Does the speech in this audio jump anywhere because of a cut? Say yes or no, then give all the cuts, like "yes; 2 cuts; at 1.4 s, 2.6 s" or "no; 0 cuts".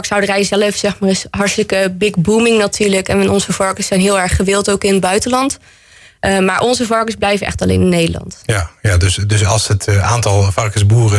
no; 0 cuts